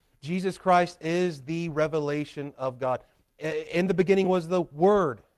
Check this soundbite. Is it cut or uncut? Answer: uncut